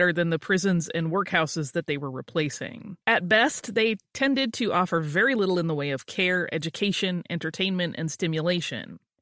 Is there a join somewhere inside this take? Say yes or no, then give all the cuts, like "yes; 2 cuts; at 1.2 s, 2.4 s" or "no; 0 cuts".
yes; 1 cut; at 3.0 s